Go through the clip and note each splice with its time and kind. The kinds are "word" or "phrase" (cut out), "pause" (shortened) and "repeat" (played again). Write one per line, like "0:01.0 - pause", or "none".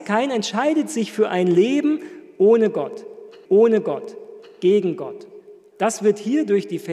0:03.5 - repeat